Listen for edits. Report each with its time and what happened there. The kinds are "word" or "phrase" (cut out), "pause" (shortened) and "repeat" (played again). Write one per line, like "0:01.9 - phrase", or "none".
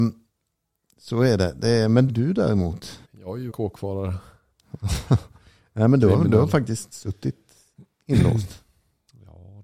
0:02.1 - word
0:03.0 - pause
0:03.5 - phrase